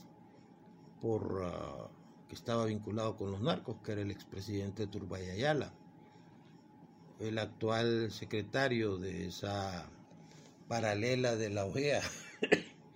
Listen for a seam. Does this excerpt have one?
no; 0 cuts

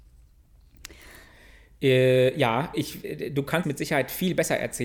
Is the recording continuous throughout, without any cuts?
no; 2 cuts; at 2.7 s, 3.6 s

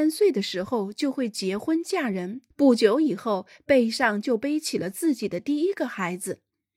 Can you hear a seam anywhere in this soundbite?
yes; 1 cut; at 2.5 s

